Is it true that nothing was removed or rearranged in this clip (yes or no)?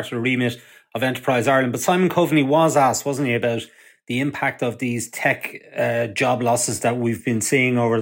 yes